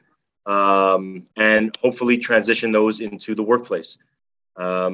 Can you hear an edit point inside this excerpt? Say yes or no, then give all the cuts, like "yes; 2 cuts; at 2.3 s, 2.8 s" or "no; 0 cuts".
yes; 1 cut; at 1.3 s